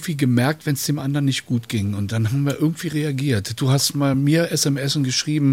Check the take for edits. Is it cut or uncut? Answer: uncut